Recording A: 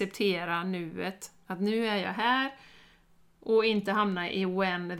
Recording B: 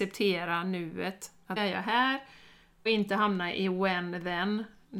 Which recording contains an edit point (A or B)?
B